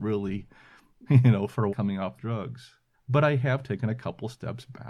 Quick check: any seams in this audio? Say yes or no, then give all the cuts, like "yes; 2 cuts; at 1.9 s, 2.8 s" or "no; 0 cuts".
yes; 4 cuts; at 1.1 s, 1.7 s, 2.2 s, 2.9 s